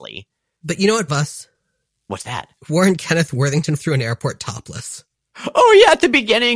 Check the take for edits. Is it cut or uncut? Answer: cut